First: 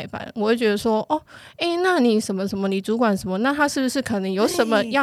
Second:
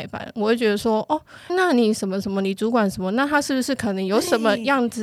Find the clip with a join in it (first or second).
second